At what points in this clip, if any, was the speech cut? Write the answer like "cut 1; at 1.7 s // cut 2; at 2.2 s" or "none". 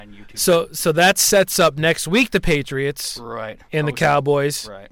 cut 1; at 3.7 s